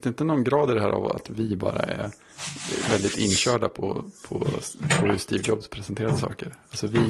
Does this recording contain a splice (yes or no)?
no